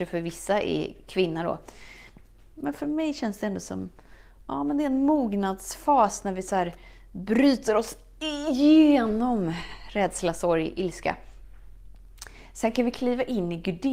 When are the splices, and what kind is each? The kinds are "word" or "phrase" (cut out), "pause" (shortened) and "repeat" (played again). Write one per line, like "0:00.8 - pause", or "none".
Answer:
none